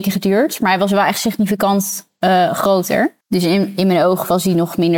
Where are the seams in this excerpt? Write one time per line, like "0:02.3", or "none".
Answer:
0:03.2